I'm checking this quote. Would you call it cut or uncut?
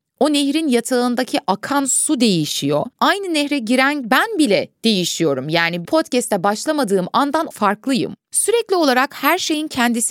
cut